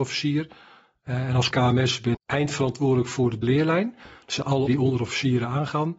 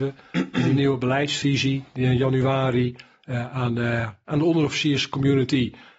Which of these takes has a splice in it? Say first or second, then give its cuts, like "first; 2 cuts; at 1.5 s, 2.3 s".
first; 4 cuts; at 1.5 s, 2.1 s, 3.4 s, 4.7 s